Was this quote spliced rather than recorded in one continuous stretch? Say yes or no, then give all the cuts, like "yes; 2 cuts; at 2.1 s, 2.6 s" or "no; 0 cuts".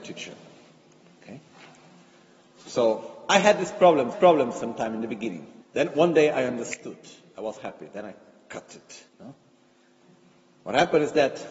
yes; 4 cuts; at 4.1 s, 5.6 s, 7.6 s, 9.1 s